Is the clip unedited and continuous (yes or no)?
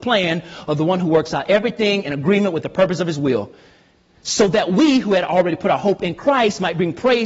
yes